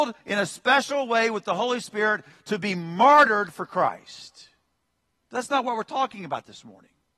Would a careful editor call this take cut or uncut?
uncut